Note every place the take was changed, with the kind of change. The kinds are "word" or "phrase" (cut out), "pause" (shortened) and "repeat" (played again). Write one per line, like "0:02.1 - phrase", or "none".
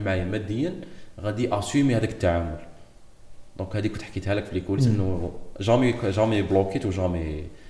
none